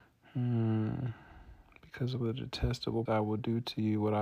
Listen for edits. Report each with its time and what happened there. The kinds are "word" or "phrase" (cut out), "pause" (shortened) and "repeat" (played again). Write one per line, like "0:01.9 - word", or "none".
0:02.2 - word
0:03.1 - word